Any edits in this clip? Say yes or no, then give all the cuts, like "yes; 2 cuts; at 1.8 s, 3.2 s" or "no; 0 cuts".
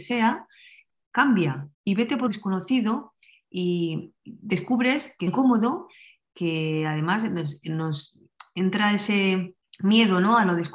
yes; 5 cuts; at 1.7 s, 2.3 s, 4.2 s, 5.3 s, 9.6 s